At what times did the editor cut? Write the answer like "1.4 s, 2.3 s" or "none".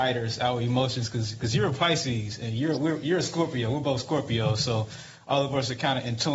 none